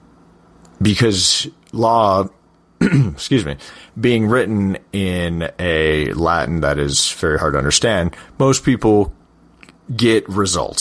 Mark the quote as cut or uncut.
uncut